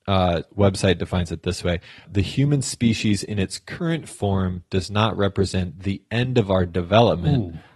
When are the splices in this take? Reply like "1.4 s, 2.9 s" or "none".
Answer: 2.0 s